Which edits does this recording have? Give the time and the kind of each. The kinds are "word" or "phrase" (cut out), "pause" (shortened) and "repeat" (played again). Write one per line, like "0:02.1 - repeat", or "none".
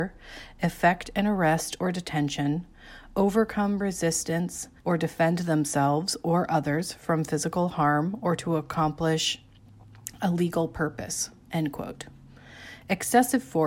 0:04.8 - pause